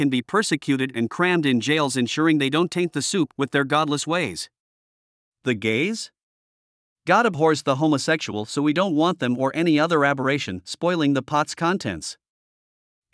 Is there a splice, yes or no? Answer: no